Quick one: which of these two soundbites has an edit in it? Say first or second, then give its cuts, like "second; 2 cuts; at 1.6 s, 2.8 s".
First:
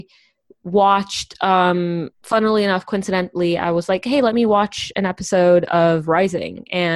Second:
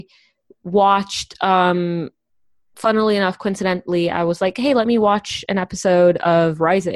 first; 1 cut; at 2.1 s